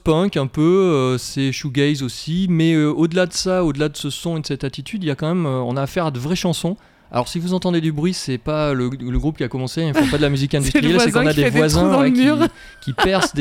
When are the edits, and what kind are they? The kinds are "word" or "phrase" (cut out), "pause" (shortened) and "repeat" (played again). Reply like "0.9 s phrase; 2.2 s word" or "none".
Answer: none